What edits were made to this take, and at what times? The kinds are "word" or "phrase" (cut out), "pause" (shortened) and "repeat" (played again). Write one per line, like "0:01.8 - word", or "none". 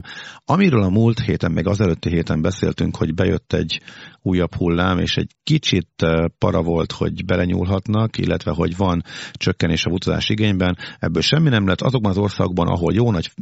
0:05.3 - pause